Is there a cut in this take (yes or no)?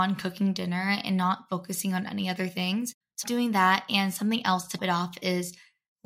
yes